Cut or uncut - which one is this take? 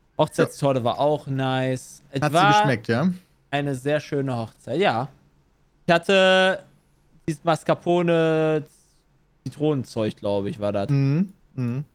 uncut